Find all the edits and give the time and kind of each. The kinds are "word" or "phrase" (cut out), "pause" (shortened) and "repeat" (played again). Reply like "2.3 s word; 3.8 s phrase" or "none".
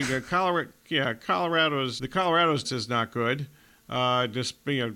2.0 s word; 2.6 s word